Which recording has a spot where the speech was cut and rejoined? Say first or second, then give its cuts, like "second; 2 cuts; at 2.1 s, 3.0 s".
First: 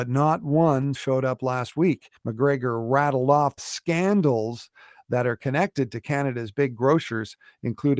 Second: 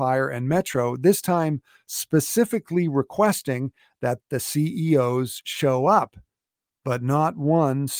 first; 3 cuts; at 1.0 s, 2.2 s, 3.6 s